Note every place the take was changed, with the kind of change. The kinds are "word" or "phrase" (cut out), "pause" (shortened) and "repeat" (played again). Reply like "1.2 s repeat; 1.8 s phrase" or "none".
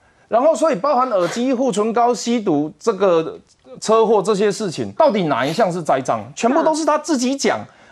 5.0 s word

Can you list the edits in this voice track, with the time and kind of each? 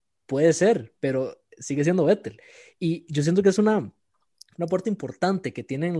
none

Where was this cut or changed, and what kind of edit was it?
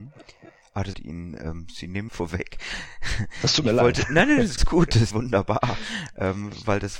0.9 s phrase; 2.1 s phrase; 4.6 s word; 5.1 s word

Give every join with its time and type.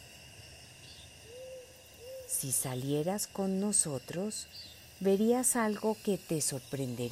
4.9 s pause

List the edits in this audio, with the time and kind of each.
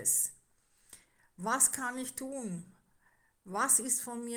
none

